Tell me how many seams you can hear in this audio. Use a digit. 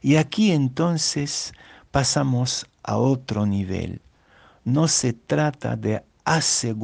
0